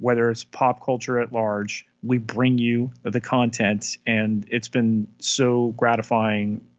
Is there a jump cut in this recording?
no; 0 cuts

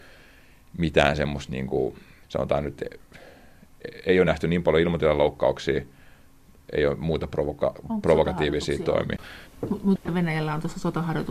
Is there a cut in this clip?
no; 0 cuts

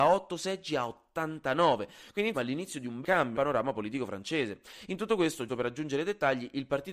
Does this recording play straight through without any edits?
no; 4 cuts; at 2.3 s, 3.0 s, 3.3 s, 5.5 s

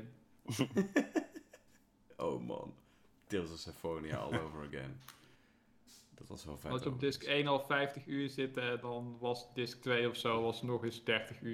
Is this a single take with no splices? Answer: yes; 0 cuts

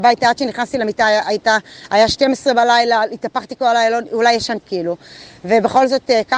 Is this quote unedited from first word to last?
no; 1 cut; at 4.6 s

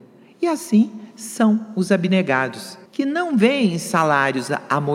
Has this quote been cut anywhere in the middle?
yes; 1 cut; at 2.9 s

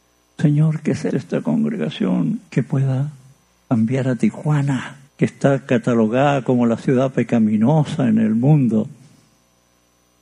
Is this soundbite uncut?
no; 4 cuts; at 1.1 s, 2.5 s, 3.4 s, 5.1 s

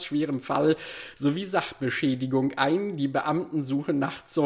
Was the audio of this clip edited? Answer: no; 0 cuts

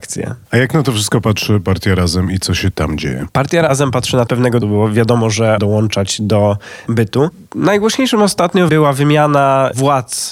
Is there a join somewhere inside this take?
yes; 5 cuts; at 4.3 s, 4.6 s, 5.6 s, 6.9 s, 8.7 s

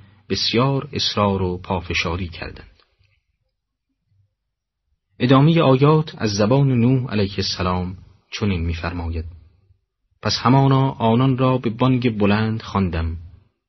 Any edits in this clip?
no; 0 cuts

